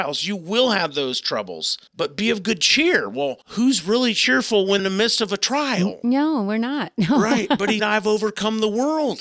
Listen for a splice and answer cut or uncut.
cut